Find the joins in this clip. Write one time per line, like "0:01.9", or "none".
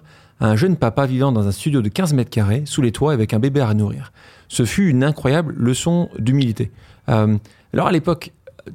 none